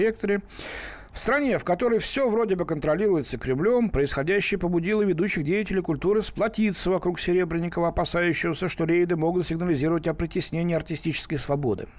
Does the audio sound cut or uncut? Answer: uncut